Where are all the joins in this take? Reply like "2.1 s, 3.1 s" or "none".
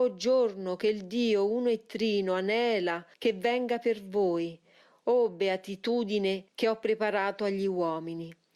3.1 s, 6.5 s